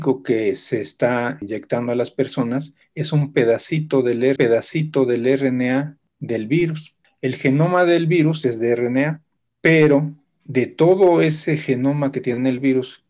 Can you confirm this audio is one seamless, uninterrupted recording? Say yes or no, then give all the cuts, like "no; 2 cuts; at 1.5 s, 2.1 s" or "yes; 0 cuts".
no; 1 cut; at 4.4 s